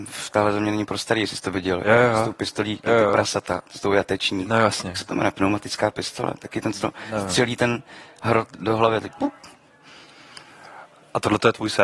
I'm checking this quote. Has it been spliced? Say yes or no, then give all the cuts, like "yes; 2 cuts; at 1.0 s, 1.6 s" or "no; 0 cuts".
no; 0 cuts